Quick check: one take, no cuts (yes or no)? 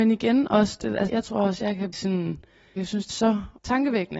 no